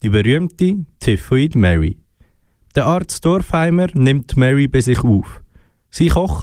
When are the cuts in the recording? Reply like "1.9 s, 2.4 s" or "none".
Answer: none